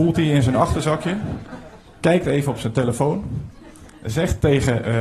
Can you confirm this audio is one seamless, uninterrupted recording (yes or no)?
yes